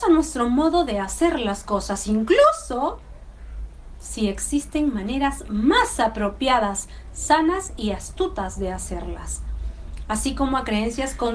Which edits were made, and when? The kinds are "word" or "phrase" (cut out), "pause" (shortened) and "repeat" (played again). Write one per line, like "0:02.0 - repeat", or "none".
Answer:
none